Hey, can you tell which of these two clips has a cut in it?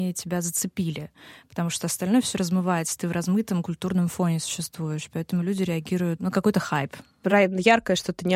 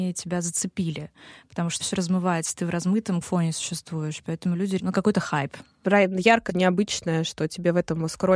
second; 4 cuts; at 1.8 s, 3.2 s, 4.8 s, 6.5 s

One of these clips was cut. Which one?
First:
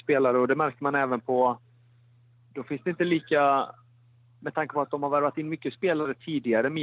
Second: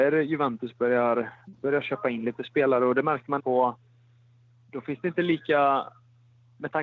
second; 1 cut; at 3.4 s

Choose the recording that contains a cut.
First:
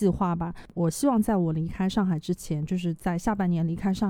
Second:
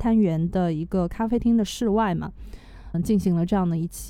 second; 1 cut; at 2.9 s

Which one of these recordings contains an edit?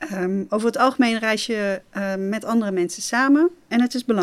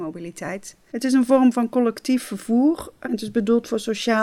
second; 1 cut; at 3.0 s

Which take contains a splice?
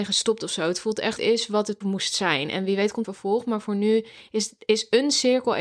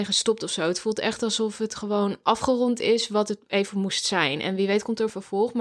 first; 3 cuts; at 1.2 s, 1.8 s, 3.0 s

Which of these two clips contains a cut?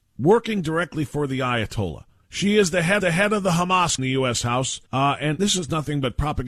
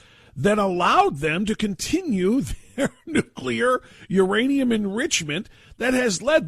first; 5 cuts; at 2.2 s, 3.0 s, 4.0 s, 4.9 s, 5.4 s

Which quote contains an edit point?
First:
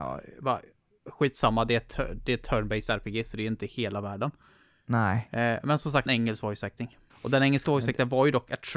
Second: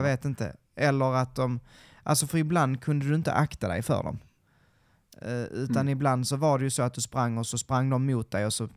first; 2 cuts; at 6.1 s, 7.1 s

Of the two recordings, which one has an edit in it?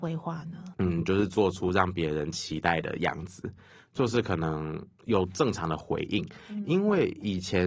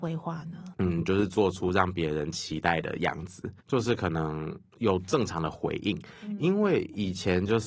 second; 1 cut; at 3.6 s

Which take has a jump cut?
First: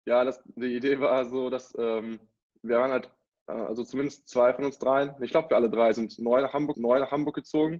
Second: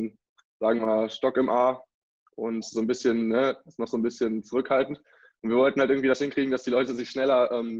first; 1 cut; at 6.7 s

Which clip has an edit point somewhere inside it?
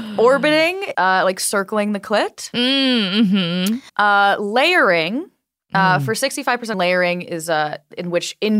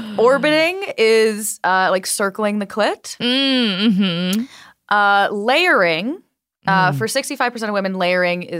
first; 3 cuts; at 0.9 s, 3.9 s, 6.7 s

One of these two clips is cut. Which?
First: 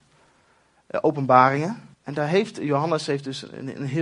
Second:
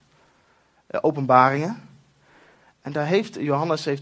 first; 1 cut; at 1.9 s

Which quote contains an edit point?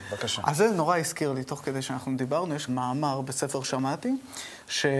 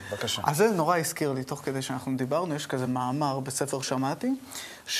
first; 1 cut; at 2.7 s

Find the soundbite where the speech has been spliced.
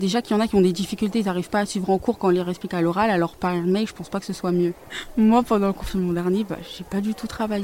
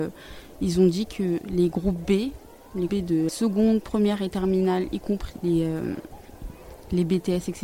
second; 3 cuts; at 2.9 s, 3.3 s, 5.4 s

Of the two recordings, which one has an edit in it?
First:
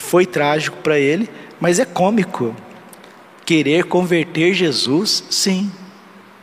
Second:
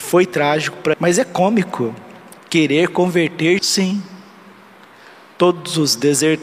second; 3 cuts; at 0.9 s, 2.4 s, 3.6 s

